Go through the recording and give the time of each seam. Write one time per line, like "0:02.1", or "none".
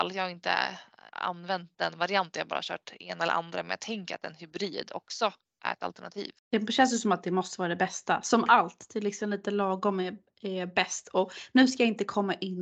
0:01.1
0:06.4